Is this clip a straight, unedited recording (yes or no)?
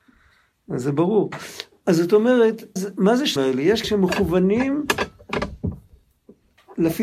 no